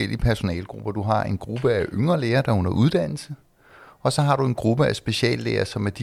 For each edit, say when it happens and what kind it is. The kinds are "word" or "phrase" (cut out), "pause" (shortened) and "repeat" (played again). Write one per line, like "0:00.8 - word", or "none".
none